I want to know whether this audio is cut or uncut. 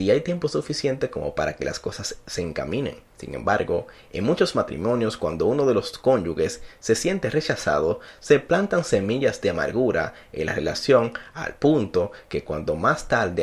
uncut